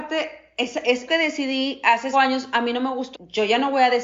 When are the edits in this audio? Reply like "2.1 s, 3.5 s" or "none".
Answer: 1.1 s, 2.1 s, 3.1 s